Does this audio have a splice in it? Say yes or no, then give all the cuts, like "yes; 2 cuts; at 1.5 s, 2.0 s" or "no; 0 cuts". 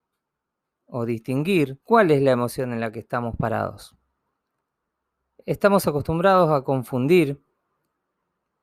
yes; 1 cut; at 1.8 s